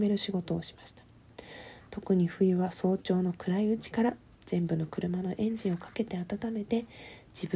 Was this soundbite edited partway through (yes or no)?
no